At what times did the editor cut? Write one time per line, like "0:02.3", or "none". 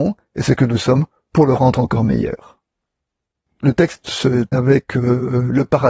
0:04.5